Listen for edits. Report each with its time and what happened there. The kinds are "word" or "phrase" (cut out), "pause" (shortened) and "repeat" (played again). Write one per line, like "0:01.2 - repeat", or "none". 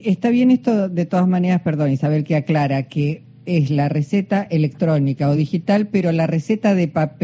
none

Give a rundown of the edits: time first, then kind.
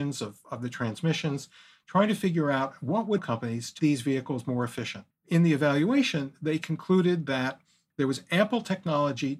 0:03.2 - phrase
0:03.8 - word
0:05.1 - pause

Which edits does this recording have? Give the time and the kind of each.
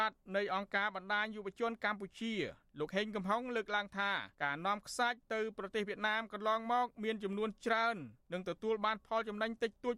0:04.3 - pause

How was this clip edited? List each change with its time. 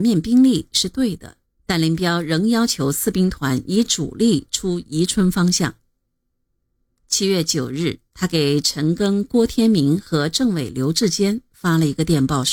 0:01.4 - pause
0:08.1 - pause

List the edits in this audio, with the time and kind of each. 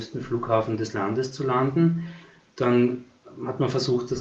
none

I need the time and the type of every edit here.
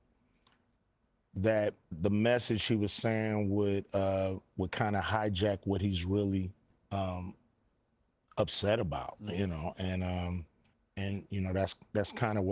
0:01.9 - word
0:06.7 - pause
0:10.7 - pause

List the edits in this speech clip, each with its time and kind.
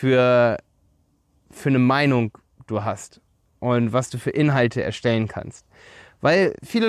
none

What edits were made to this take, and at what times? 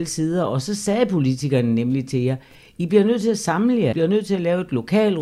0:03.9 - word

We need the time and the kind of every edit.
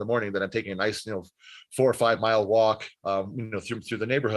0:03.0 - pause

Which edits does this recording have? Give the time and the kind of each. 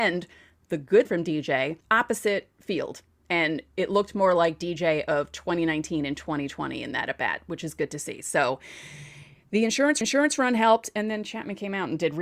0:01.1 - word
0:01.8 - pause
0:10.0 - repeat

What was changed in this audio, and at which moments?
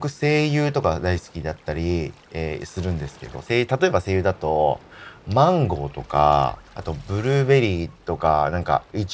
0:06.7 - pause

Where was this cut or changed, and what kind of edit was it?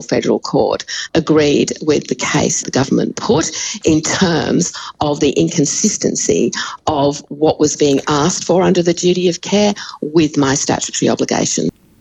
0:01.1 - word
0:02.6 - word

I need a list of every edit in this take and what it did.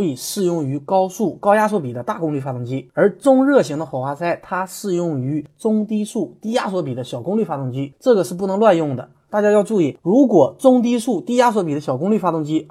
none

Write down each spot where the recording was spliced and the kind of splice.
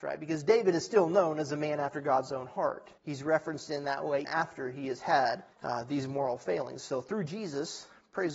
0:03.0 - pause
0:04.2 - word
0:05.5 - pause

